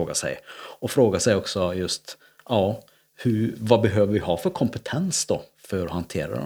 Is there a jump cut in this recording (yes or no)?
no